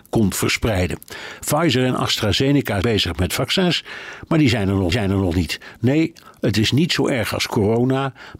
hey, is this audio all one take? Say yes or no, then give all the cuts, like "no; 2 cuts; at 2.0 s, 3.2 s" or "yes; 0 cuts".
no; 2 cuts; at 2.8 s, 4.9 s